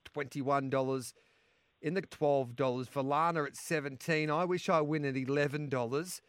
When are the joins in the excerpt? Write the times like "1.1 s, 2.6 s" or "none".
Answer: 2.0 s